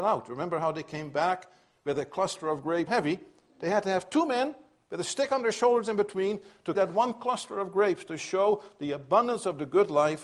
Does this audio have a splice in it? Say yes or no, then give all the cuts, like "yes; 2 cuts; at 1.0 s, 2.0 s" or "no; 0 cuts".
yes; 2 cuts; at 2.9 s, 6.7 s